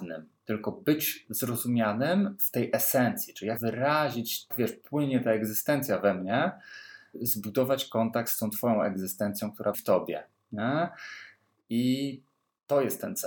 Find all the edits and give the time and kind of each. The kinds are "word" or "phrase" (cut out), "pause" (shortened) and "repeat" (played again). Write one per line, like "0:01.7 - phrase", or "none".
0:03.6 - word
0:04.5 - word
0:07.1 - word
0:09.7 - word